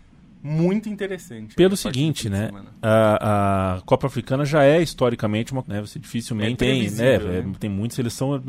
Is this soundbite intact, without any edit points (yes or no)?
no